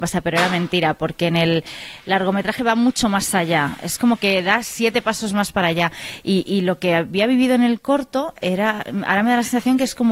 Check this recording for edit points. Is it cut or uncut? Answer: uncut